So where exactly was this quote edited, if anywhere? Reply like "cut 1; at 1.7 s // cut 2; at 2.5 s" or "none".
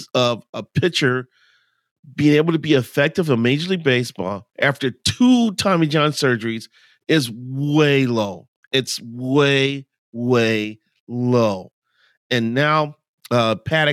none